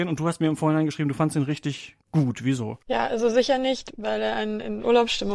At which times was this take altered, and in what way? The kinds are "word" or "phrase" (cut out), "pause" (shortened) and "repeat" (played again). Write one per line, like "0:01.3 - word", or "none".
0:02.0 - pause
0:02.8 - pause